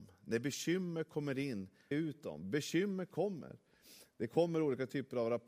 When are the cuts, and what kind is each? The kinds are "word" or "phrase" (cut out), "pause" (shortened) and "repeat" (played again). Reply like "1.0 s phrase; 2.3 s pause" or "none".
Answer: 1.9 s word